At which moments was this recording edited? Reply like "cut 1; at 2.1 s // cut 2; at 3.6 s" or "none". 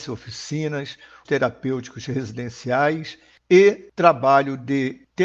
cut 1; at 1.2 s